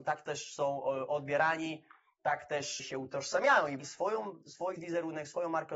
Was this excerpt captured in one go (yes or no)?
no